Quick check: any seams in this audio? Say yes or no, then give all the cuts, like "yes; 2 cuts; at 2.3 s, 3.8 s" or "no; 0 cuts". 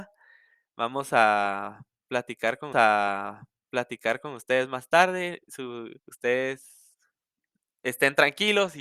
yes; 2 cuts; at 2.7 s, 6.0 s